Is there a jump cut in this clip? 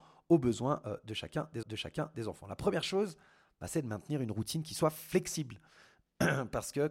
yes; 1 cut; at 1.6 s

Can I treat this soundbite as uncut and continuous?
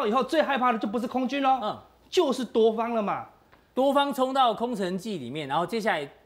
yes; 0 cuts

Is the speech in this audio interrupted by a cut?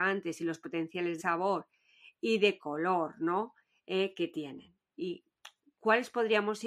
yes; 1 cut; at 1.2 s

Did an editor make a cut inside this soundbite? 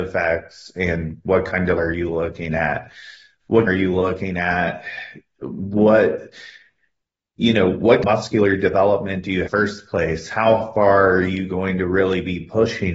yes; 4 cuts; at 1.8 s, 3.7 s, 8.0 s, 9.5 s

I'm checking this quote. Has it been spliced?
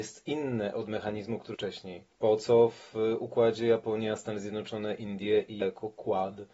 yes; 3 cuts; at 1.5 s, 2.1 s, 5.6 s

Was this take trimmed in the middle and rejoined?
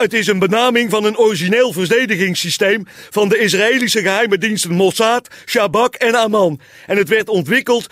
no; 0 cuts

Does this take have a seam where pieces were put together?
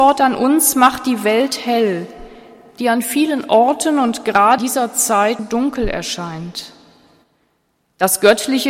yes; 2 cuts; at 4.6 s, 5.4 s

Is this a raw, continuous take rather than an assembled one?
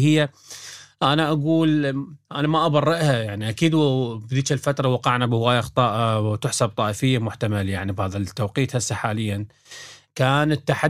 yes; 0 cuts

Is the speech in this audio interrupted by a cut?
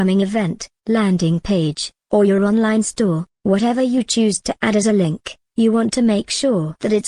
yes; 1 cut; at 3.3 s

